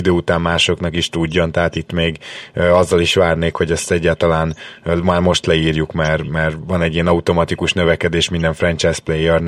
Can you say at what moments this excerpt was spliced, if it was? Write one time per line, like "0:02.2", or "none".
none